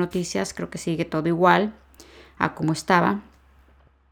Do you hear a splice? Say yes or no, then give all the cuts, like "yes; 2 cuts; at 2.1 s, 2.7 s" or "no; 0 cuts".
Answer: no; 0 cuts